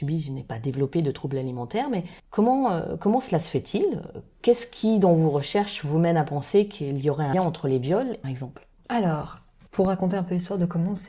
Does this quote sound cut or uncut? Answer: cut